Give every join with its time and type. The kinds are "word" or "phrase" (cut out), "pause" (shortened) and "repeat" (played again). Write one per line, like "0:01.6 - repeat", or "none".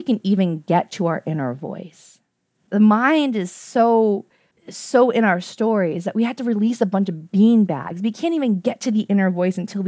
none